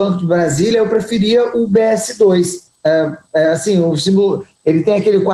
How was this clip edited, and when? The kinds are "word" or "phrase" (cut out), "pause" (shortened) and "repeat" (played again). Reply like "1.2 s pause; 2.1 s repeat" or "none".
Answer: none